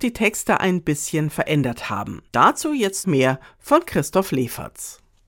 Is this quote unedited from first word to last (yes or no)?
no